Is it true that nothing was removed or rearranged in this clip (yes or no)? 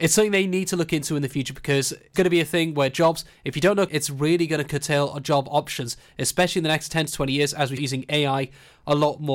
no